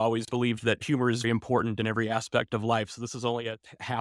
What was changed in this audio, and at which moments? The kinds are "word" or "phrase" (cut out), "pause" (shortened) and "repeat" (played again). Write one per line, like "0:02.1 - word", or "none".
0:01.2 - word